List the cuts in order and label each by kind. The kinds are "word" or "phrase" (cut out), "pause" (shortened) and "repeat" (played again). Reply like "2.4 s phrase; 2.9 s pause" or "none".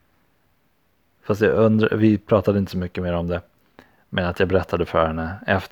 none